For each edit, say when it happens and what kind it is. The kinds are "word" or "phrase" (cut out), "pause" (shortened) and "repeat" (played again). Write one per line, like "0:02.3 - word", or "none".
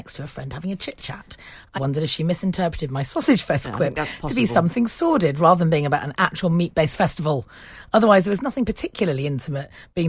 0:01.8 - word